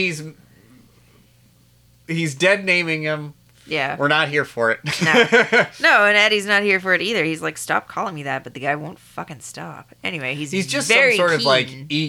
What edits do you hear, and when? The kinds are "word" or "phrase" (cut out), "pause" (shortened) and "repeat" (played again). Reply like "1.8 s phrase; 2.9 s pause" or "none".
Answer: none